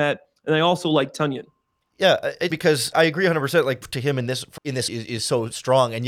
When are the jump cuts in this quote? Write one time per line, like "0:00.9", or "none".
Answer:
0:02.5
0:02.9
0:03.8
0:04.6
0:04.9